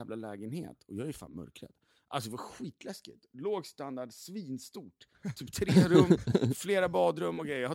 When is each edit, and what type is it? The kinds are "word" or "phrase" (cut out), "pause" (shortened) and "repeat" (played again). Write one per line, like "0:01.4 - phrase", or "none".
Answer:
none